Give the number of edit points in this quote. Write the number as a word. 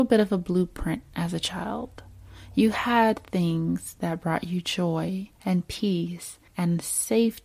two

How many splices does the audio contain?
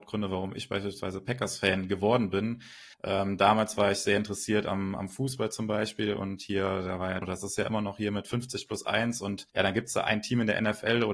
three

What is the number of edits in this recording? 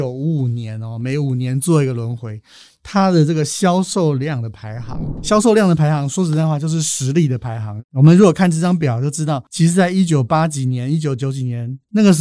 zero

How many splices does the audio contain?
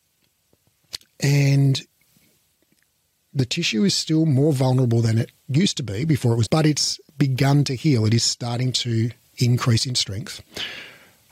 three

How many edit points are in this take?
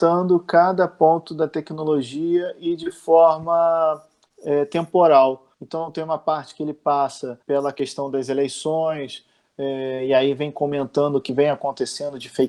two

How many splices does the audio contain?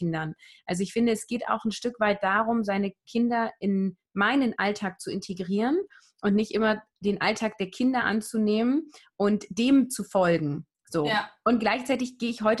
zero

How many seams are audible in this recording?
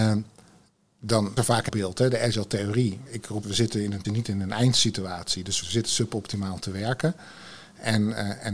six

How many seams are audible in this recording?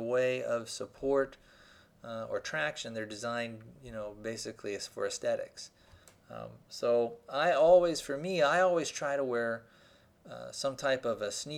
zero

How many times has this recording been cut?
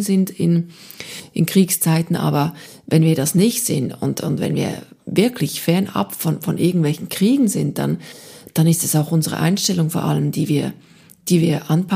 zero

